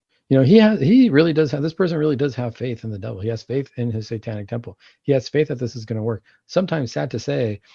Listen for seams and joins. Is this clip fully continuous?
yes; 0 cuts

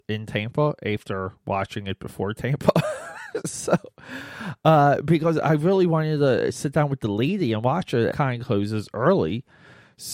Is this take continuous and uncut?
no; 1 cut; at 8.1 s

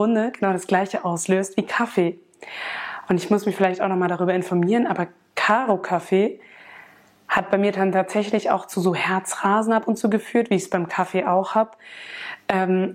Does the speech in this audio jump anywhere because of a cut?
no; 0 cuts

